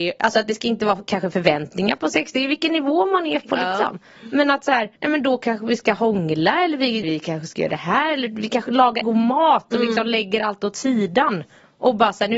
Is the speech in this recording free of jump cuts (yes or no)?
no